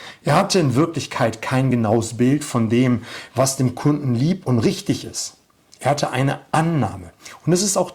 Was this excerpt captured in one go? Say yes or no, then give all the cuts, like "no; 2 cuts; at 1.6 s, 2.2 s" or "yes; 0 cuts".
yes; 0 cuts